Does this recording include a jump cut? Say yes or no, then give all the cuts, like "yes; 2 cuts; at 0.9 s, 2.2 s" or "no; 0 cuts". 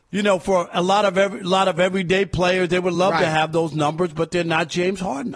no; 0 cuts